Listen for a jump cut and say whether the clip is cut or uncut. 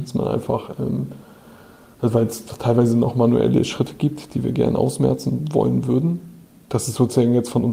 uncut